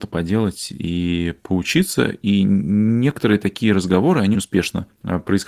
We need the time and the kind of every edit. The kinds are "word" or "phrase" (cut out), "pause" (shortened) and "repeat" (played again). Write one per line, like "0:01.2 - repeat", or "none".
0:04.3 - word